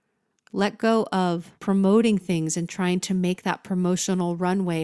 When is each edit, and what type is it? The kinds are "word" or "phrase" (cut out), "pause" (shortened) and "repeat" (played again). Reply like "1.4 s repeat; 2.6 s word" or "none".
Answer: 1.6 s pause